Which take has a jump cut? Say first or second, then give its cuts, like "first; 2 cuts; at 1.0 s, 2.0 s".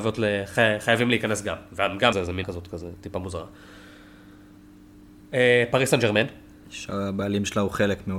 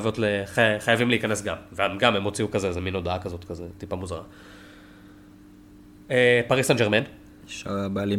first; 2 cuts; at 2.1 s, 2.4 s